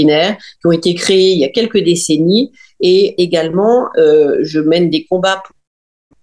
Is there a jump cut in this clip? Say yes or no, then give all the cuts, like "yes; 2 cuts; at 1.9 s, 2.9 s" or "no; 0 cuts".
yes; 1 cut; at 3.2 s